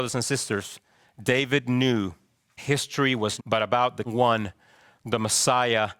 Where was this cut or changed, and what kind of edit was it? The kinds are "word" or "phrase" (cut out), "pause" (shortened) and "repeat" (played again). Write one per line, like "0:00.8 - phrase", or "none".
0:02.6 - word
0:03.4 - phrase
0:04.0 - word